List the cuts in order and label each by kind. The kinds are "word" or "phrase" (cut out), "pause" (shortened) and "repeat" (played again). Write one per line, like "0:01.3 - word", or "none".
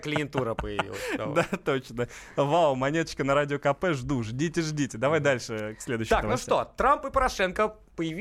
none